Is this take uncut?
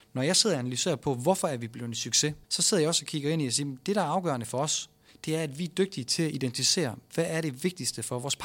no; 2 cuts; at 2.4 s, 5.1 s

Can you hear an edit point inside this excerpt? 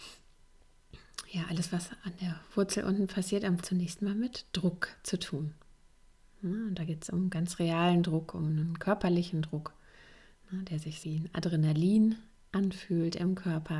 yes; 2 cuts; at 3.6 s, 11.0 s

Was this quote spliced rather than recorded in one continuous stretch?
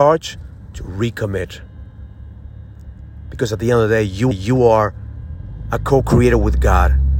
yes; 1 cut; at 4.3 s

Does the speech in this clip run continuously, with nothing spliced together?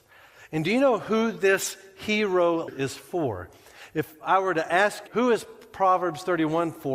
no; 2 cuts; at 2.7 s, 5.1 s

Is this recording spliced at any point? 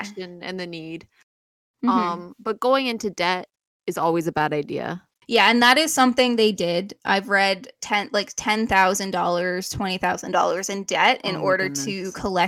no; 0 cuts

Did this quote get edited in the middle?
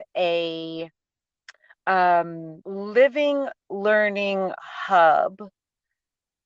yes; 1 cut; at 2.6 s

